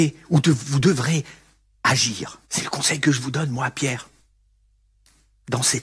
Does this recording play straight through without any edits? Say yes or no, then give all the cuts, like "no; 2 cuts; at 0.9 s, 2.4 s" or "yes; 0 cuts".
no; 1 cut; at 2.4 s